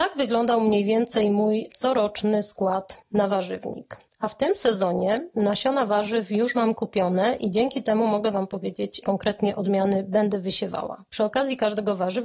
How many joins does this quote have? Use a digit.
3